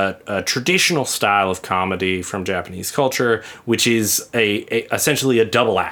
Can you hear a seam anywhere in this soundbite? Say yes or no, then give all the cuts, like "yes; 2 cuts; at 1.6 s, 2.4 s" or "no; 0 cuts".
no; 0 cuts